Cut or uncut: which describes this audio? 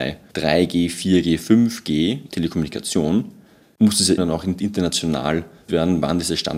cut